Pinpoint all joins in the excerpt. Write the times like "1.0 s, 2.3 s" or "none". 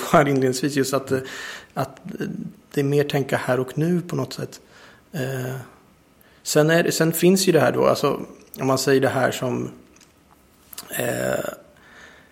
none